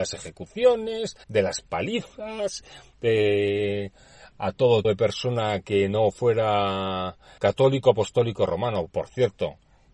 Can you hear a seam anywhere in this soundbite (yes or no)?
yes